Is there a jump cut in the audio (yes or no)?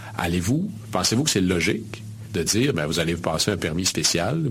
no